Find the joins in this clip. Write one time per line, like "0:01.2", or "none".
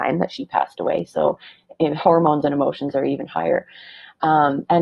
none